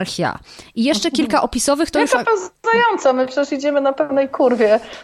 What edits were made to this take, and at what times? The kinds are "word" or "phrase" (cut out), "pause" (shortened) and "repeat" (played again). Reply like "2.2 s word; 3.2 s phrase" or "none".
none